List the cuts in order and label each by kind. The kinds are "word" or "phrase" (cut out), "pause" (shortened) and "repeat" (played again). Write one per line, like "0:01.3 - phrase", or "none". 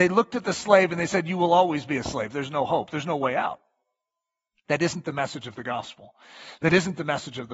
none